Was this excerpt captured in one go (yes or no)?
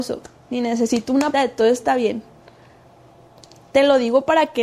no